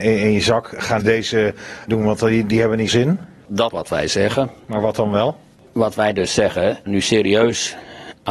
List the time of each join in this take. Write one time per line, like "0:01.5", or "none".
0:01.0
0:01.9
0:02.9
0:03.7
0:06.9